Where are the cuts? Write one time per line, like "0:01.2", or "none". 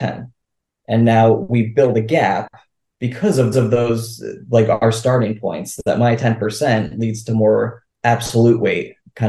0:03.5
0:07.9

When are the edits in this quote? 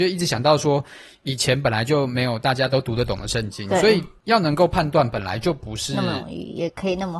none

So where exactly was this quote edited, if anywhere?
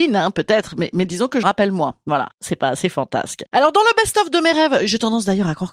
0:01.4

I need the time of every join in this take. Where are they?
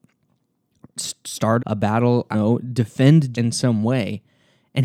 0:01.6
0:02.3
0:03.3

